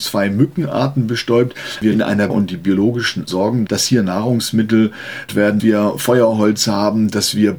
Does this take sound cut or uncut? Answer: cut